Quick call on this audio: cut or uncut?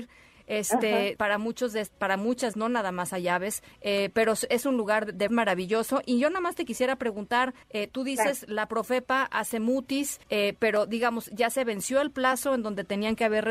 cut